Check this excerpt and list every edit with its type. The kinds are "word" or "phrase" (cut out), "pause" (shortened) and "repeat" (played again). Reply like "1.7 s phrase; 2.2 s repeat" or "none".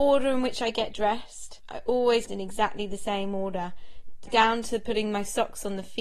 2.3 s phrase; 4.3 s word